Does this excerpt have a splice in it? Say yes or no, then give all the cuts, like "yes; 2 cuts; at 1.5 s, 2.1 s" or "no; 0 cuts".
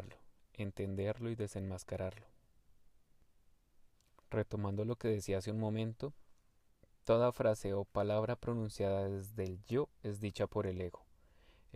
yes; 1 cut; at 3.9 s